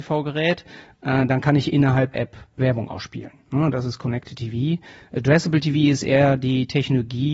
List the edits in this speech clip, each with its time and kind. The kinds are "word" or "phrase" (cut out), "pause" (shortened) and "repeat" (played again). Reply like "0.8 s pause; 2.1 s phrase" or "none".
2.1 s word